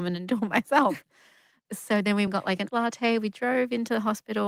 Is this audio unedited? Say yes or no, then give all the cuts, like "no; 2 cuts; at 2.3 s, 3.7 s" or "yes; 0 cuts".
no; 3 cuts; at 1.7 s, 2.3 s, 2.7 s